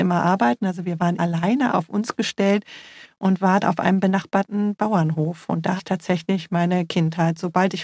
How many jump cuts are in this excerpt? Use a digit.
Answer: 5